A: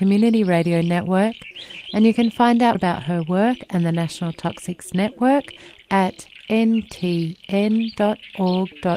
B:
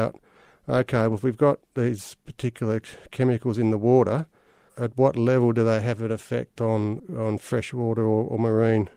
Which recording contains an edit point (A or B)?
A